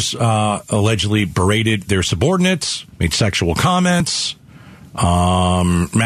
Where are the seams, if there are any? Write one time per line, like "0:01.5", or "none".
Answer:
0:02.9